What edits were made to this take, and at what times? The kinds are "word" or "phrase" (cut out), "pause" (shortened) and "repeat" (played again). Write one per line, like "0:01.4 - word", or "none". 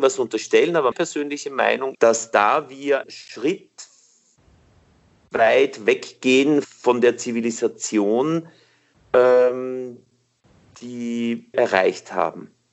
0:00.9 - word
0:01.9 - word
0:03.0 - word
0:06.6 - word
0:11.5 - word